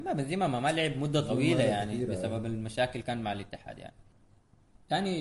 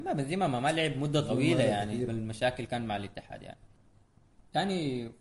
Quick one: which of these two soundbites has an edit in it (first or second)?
second